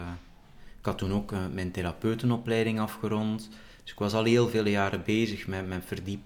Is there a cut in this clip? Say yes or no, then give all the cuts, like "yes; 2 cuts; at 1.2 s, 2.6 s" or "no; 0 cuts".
no; 0 cuts